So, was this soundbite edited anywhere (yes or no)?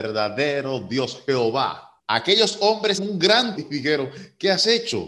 yes